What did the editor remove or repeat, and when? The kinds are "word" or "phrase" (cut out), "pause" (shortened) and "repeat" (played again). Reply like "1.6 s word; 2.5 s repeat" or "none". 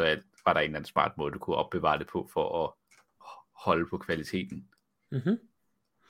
none